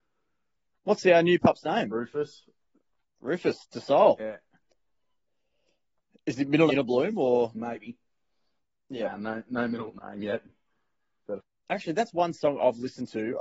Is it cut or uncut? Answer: cut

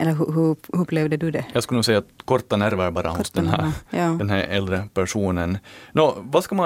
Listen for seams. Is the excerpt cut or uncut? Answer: uncut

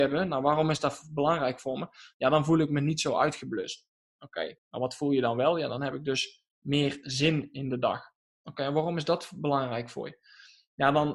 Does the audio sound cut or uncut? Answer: cut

